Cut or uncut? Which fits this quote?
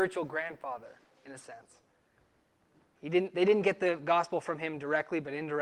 uncut